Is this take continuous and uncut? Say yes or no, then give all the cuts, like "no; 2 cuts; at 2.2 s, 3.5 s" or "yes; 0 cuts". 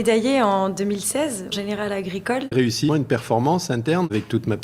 no; 3 cuts; at 1.5 s, 2.5 s, 2.9 s